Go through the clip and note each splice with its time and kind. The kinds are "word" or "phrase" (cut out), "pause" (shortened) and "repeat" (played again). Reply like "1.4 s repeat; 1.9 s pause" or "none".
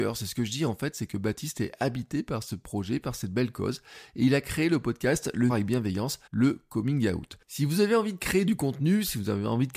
5.5 s phrase; 6.3 s pause